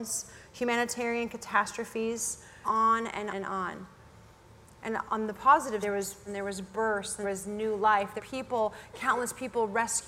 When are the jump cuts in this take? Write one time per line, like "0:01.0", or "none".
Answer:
0:02.6
0:03.3
0:05.1
0:05.8
0:06.3
0:07.2
0:08.2